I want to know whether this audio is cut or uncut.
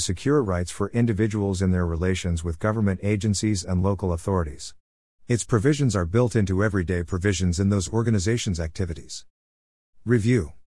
uncut